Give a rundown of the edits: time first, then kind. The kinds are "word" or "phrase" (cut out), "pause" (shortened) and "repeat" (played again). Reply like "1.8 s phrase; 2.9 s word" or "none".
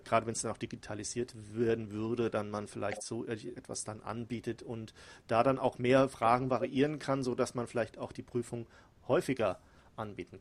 3.5 s word